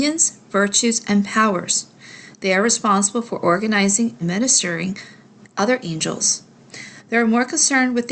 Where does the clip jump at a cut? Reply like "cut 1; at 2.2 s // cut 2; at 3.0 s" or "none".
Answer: cut 1; at 4.2 s